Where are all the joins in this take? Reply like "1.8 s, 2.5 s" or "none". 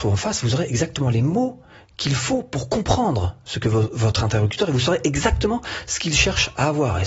none